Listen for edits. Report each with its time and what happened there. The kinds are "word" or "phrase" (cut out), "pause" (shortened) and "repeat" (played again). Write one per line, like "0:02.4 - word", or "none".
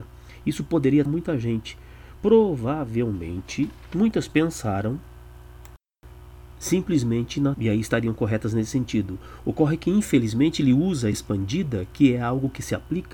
0:01.1 - word
0:02.2 - word
0:04.3 - word
0:07.5 - word
0:11.1 - word